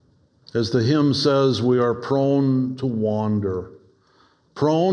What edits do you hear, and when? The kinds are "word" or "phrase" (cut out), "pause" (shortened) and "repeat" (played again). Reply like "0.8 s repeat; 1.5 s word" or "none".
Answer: none